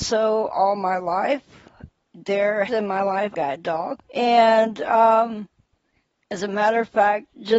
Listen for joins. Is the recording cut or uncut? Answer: cut